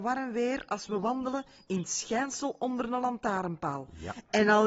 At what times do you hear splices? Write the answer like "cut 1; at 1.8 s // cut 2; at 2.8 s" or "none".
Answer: none